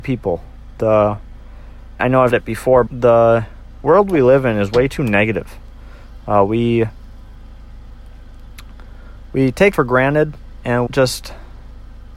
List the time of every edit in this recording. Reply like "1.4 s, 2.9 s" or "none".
2.0 s, 2.3 s, 2.9 s, 9.7 s, 10.9 s